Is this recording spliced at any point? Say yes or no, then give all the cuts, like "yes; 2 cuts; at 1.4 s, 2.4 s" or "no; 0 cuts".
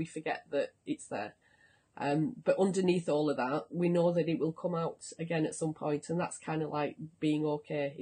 no; 0 cuts